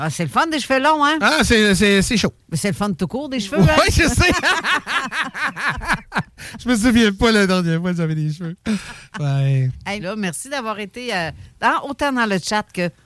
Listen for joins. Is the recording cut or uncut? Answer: cut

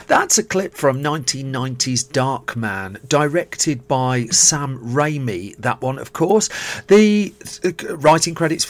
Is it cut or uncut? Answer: uncut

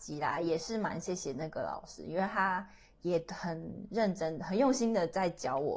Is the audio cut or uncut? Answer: uncut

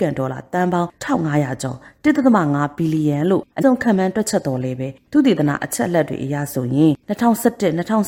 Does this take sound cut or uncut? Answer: cut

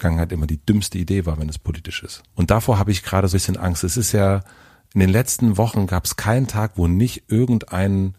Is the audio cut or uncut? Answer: cut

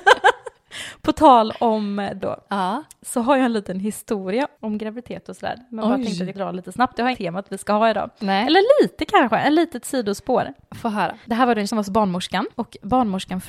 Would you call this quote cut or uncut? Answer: cut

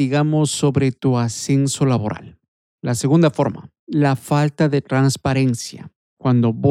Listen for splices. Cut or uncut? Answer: uncut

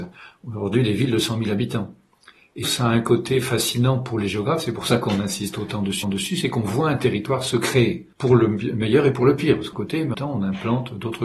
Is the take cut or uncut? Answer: cut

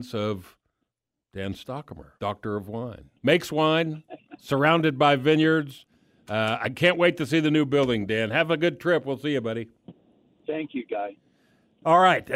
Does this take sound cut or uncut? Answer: cut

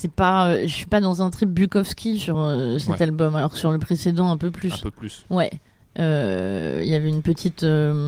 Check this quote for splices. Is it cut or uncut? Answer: uncut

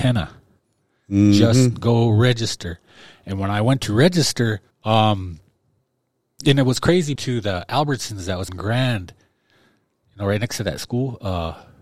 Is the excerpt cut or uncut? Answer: cut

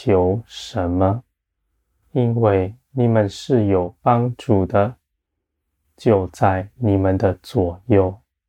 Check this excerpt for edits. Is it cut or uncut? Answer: uncut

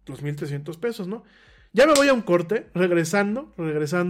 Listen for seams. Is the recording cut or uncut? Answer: uncut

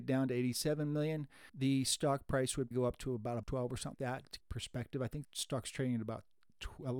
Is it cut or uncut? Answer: cut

